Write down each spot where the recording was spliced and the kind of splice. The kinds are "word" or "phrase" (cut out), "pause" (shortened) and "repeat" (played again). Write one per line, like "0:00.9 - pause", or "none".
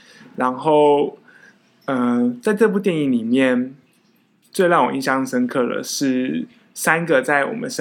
none